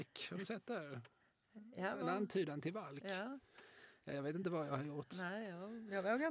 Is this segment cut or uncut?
uncut